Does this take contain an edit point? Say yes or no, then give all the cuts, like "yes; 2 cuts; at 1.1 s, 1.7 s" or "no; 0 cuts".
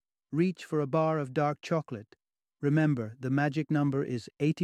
no; 0 cuts